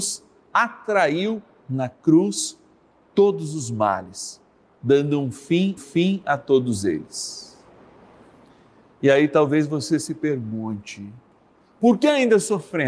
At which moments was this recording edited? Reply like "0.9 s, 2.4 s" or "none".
5.8 s